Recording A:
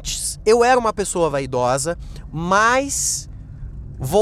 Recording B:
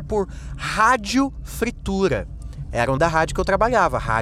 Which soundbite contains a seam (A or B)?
B